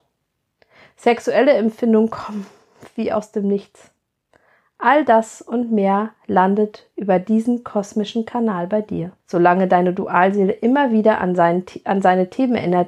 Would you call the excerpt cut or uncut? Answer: cut